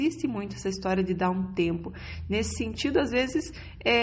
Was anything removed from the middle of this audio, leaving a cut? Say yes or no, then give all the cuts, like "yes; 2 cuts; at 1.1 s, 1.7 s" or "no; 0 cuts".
no; 0 cuts